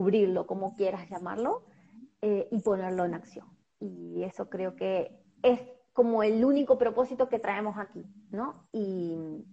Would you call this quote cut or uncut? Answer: cut